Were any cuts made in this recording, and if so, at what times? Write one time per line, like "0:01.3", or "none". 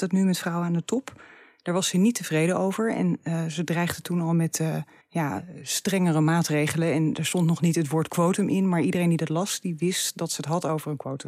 0:05.0